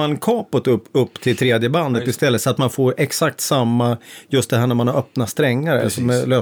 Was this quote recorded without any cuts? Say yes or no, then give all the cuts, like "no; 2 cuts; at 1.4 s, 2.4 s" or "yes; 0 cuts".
yes; 0 cuts